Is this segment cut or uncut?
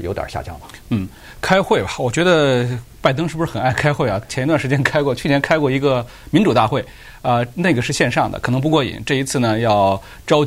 uncut